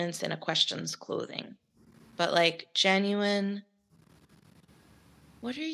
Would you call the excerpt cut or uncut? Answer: uncut